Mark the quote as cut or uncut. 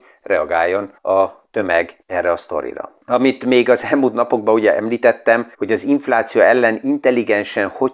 cut